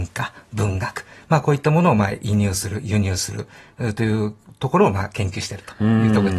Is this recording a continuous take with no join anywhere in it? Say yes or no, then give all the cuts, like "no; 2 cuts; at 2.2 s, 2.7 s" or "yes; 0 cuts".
yes; 0 cuts